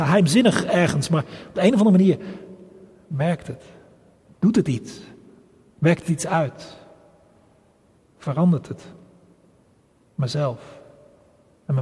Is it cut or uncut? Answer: uncut